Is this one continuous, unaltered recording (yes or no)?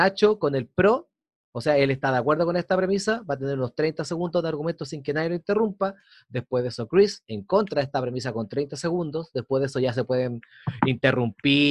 yes